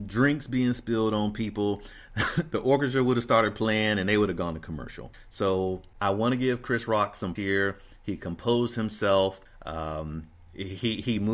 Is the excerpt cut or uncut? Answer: cut